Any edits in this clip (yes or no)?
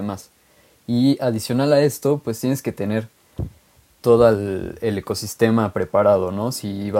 no